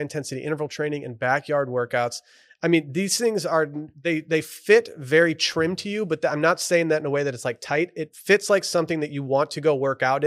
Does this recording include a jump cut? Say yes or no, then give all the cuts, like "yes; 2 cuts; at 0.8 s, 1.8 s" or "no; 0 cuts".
no; 0 cuts